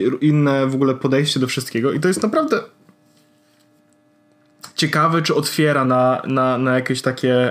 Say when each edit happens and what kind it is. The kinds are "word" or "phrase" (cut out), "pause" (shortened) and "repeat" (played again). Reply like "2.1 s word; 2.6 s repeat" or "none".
5.8 s phrase